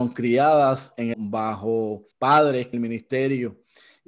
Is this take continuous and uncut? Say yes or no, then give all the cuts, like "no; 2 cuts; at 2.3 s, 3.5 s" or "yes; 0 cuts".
no; 3 cuts; at 1.1 s, 2.1 s, 2.7 s